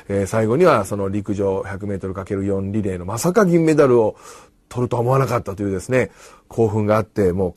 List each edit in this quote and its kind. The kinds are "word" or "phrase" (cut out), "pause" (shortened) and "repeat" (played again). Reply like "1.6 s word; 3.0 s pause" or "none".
none